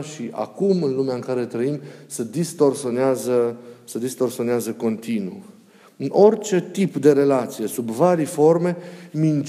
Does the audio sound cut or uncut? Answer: uncut